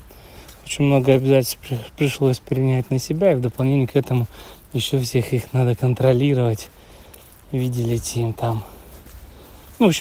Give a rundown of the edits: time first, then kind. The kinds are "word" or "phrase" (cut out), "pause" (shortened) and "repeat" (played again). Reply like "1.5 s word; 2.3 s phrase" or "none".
none